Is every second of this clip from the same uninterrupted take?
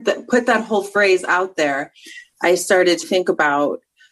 no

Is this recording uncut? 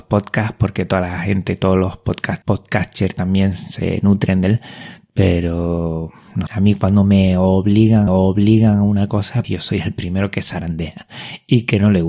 no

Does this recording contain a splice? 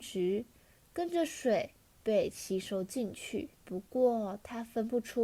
yes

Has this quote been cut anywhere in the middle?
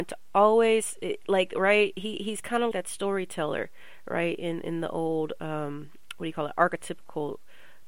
yes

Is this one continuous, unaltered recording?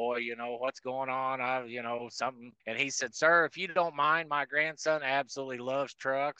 no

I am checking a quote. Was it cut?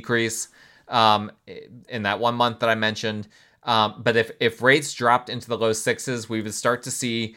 yes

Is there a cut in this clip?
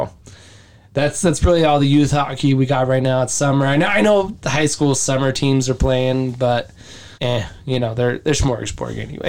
yes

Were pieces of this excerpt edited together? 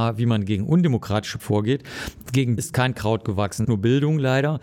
yes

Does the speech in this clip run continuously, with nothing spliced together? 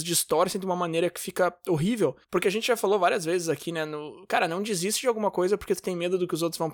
no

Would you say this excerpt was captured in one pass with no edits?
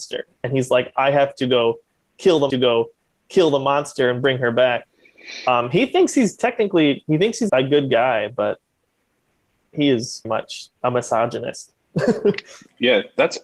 no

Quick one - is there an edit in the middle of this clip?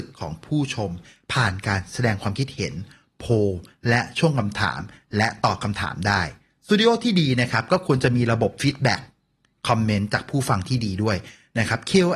no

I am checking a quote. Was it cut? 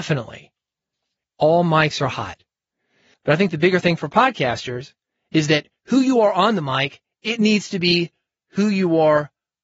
no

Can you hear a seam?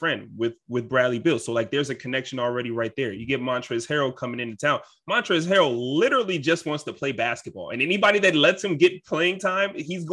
no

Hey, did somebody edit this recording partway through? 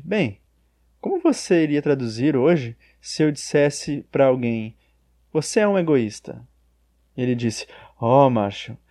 no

